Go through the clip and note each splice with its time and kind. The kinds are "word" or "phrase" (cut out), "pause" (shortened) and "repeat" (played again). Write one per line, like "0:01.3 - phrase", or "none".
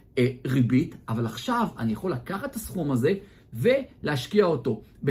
none